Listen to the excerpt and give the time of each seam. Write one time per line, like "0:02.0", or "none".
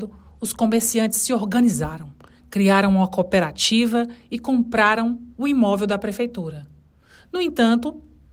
none